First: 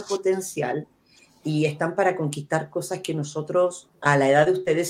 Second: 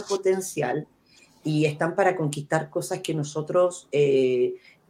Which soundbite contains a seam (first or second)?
first